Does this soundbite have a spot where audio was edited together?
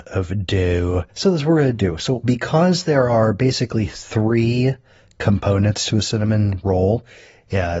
no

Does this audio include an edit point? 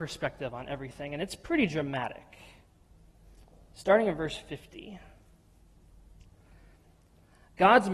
no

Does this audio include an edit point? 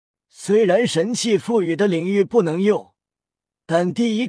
no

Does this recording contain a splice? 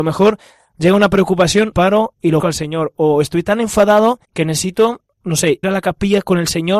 yes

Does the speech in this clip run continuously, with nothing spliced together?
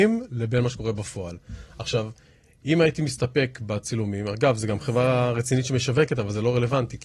yes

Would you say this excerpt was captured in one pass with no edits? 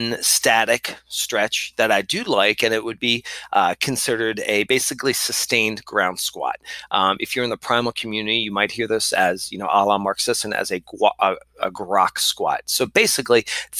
yes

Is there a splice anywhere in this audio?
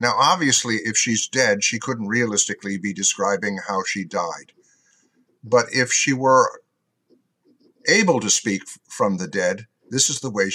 no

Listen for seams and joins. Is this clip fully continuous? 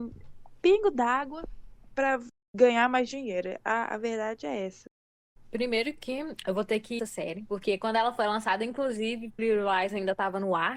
no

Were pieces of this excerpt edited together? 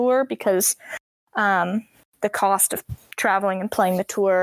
no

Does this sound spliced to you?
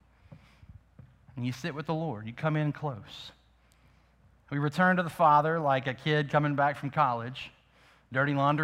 no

